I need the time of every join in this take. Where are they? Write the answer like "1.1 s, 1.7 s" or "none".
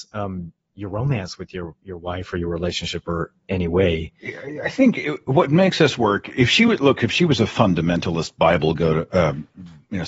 none